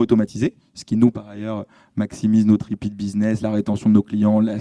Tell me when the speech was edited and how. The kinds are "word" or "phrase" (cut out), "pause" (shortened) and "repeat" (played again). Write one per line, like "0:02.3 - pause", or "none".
none